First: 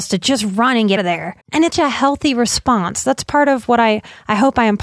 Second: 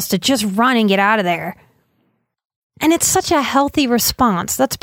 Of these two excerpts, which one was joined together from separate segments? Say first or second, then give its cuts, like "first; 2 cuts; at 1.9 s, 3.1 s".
first; 3 cuts; at 1.0 s, 1.4 s, 1.7 s